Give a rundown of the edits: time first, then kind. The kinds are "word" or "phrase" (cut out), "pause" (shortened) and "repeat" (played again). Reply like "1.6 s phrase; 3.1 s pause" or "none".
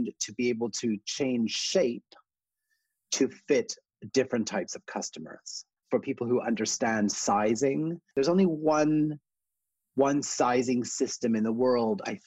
5.8 s pause